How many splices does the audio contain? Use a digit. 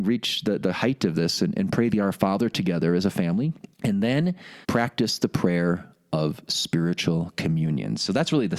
2